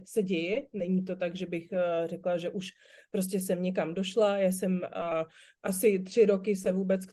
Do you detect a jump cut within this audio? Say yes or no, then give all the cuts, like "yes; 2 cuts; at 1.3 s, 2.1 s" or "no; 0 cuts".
no; 0 cuts